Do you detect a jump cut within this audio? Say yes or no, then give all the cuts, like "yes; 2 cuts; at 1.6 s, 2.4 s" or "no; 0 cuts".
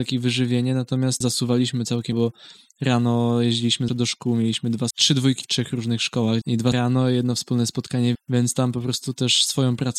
yes; 8 cuts; at 1.2 s, 2.1 s, 3.9 s, 4.9 s, 5.4 s, 6.4 s, 6.7 s, 8.1 s